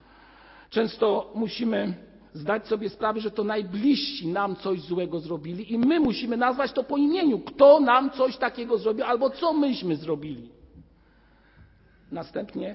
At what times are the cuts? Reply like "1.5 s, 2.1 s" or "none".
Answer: none